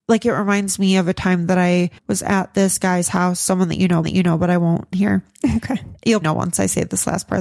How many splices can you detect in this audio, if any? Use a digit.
4